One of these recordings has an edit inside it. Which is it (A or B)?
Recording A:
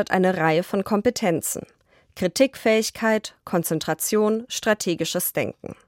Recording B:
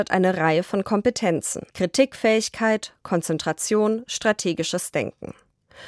B